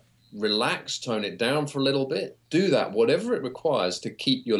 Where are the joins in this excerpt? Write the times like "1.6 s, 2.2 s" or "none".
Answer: 2.4 s